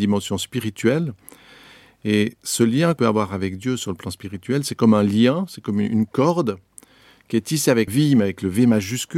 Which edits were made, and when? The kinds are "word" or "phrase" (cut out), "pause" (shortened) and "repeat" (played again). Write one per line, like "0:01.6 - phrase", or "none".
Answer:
0:03.0 - word
0:07.9 - word